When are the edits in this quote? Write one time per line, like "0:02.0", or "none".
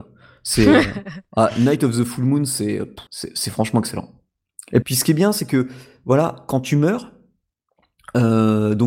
0:03.1
0:04.8